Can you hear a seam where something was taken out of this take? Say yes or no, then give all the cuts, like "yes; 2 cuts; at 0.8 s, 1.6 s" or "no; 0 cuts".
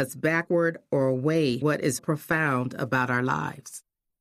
yes; 2 cuts; at 1.6 s, 2.0 s